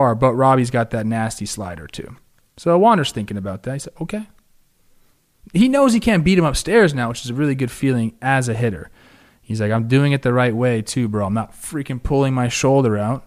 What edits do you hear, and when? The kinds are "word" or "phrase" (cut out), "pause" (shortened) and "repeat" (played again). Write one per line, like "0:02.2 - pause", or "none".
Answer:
none